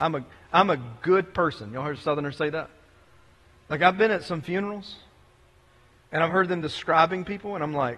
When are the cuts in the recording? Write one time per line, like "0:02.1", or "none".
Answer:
none